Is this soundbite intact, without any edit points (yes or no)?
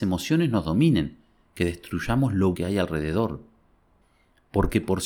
no